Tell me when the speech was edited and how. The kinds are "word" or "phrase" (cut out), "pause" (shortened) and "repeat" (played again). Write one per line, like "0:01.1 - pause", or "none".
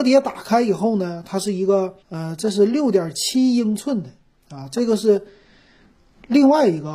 0:02.0 - pause